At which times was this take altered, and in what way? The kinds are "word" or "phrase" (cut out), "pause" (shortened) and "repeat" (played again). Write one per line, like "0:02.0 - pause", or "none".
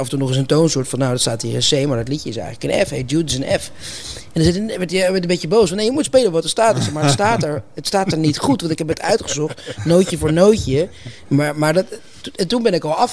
none

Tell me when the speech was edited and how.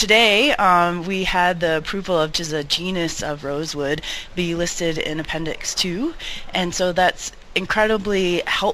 0:02.3 - phrase

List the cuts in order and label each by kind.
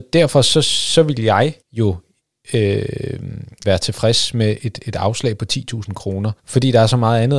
0:01.6 - pause
0:03.6 - word
0:04.6 - word
0:06.4 - pause

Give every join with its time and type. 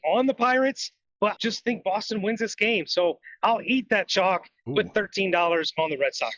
0:01.4 - word

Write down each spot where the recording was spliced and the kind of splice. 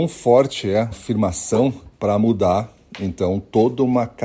0:00.9 - word
0:01.9 - pause

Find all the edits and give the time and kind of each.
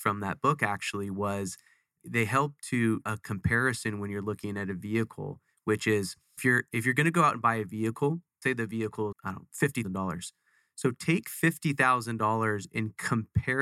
0:02.0 - word
0:03.1 - word
0:06.4 - word
0:08.4 - word
0:09.1 - word
0:09.8 - word

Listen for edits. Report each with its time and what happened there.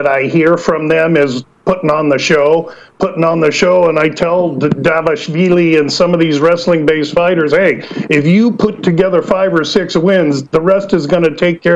none

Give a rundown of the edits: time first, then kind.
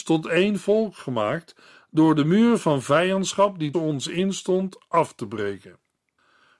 0:03.7 - word

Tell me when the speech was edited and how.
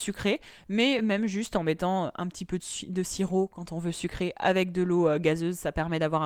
none

